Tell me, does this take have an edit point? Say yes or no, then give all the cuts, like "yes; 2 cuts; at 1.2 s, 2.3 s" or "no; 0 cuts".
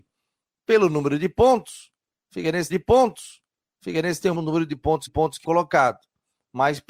yes; 4 cuts; at 2.7 s, 4.3 s, 5.1 s, 5.4 s